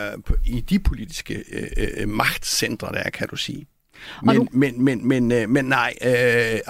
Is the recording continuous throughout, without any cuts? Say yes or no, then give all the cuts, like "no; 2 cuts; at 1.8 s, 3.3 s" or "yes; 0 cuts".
yes; 0 cuts